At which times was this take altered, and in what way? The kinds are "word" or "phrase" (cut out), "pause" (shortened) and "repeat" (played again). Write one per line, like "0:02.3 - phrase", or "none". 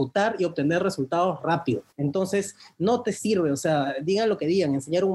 0:01.9 - pause